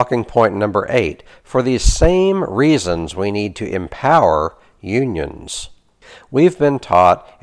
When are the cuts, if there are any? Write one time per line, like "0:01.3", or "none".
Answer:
none